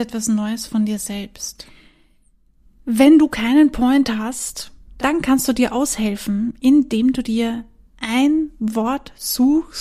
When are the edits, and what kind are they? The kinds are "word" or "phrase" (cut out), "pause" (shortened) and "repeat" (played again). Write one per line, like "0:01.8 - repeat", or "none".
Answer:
none